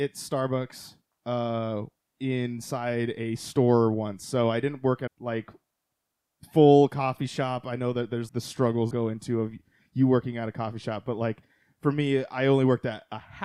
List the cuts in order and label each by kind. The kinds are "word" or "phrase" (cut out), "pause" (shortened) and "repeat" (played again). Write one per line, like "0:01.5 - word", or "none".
0:05.1 - phrase
0:08.3 - word
0:08.9 - phrase

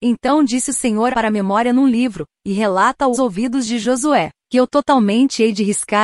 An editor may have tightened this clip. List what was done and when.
0:01.1 - phrase
0:03.1 - word

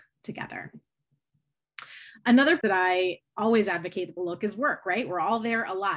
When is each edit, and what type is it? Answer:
0:02.6 - word
0:04.2 - word

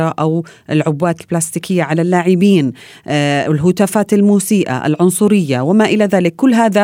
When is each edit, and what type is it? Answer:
none

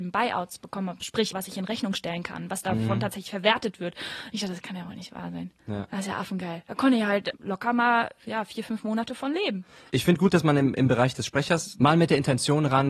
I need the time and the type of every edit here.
0:01.3 - word
0:05.6 - pause
0:07.3 - word

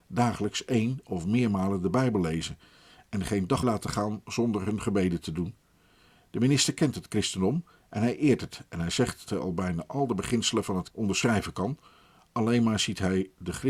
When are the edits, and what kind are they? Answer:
0:03.6 - word
0:09.3 - word
0:10.9 - word

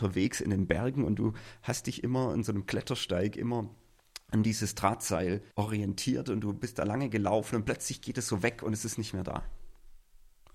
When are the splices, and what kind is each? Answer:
0:05.5 - pause

